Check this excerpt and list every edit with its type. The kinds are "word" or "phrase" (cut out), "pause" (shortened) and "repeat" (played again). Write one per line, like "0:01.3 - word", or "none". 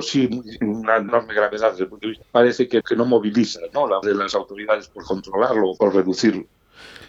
0:01.1 - word
0:02.2 - word
0:02.8 - word
0:04.0 - word
0:05.8 - word